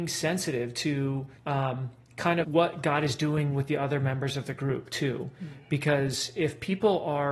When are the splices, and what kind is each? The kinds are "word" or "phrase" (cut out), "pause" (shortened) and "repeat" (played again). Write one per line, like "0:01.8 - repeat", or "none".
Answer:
0:01.4 - pause
0:02.4 - word